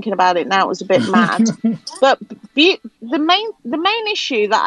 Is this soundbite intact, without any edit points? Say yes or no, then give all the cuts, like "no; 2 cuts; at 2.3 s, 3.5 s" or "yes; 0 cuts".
no; 2 cuts; at 3.0 s, 3.6 s